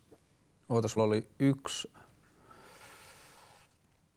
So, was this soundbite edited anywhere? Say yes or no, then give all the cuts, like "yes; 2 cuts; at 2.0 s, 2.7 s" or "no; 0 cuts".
yes; 2 cuts; at 1.0 s, 1.9 s